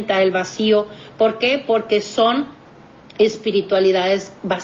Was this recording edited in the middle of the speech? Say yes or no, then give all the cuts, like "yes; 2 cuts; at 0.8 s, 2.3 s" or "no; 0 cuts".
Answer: no; 0 cuts